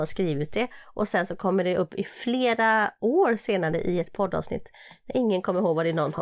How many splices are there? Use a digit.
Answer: 0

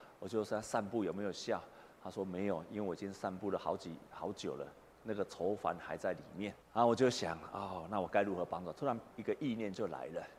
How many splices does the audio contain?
2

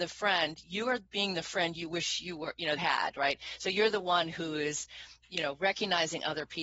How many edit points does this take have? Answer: 1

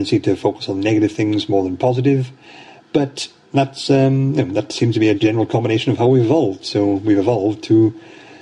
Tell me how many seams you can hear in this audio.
1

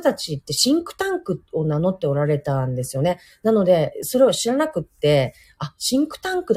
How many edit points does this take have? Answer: 0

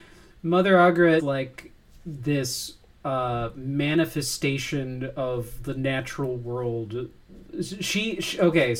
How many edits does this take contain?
1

